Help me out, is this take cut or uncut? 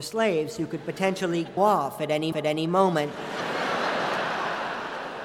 cut